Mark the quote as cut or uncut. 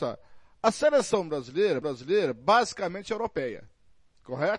cut